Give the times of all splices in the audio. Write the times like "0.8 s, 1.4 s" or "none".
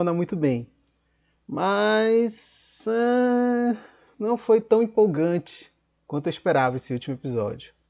none